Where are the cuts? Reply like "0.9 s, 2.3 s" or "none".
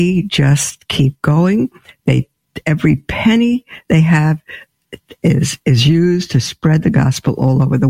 none